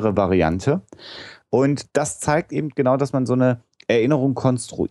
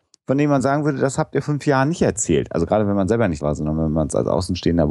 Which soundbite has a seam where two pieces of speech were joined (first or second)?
second